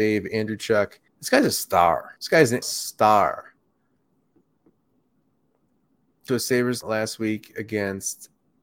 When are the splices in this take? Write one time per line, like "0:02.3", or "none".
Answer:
0:01.1
0:02.2
0:02.6
0:06.3
0:06.8